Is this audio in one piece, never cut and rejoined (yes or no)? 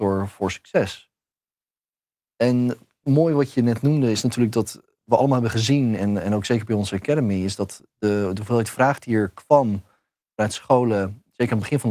yes